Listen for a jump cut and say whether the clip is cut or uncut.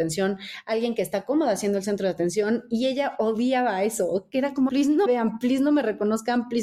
cut